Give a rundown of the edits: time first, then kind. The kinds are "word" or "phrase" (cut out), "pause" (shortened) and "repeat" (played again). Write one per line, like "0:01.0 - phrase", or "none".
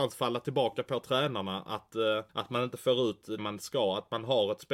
0:02.3 - pause
0:03.4 - word